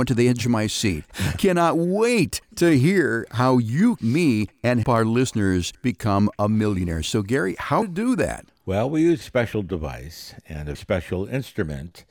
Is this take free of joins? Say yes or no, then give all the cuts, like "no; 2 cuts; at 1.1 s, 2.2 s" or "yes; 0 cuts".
no; 6 cuts; at 1.3 s, 4.0 s, 4.8 s, 7.8 s, 9.2 s, 10.7 s